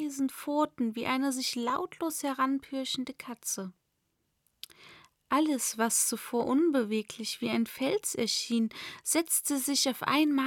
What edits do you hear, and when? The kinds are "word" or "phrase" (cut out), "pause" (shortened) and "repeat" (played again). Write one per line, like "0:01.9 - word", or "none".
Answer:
none